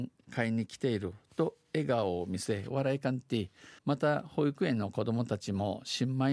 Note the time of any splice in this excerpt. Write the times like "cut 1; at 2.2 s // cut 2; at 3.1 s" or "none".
cut 1; at 3.8 s